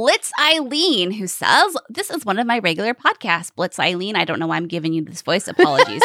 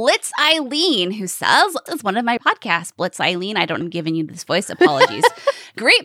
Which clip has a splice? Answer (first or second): second